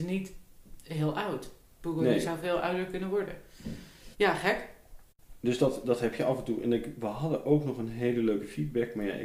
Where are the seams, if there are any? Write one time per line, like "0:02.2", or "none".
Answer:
0:04.1